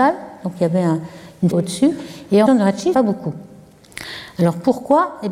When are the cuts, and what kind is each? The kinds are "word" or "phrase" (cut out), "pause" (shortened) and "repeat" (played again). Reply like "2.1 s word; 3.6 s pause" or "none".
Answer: 1.5 s word; 2.5 s phrase; 2.9 s phrase